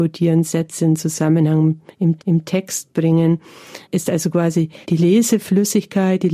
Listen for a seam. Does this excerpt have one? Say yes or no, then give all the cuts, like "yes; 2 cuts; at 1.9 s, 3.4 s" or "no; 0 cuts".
yes; 3 cuts; at 2.2 s, 3.8 s, 4.8 s